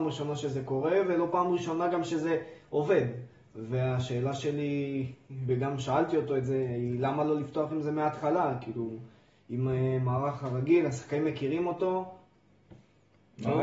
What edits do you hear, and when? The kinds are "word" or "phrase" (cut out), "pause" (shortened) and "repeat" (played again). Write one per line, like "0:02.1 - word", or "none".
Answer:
none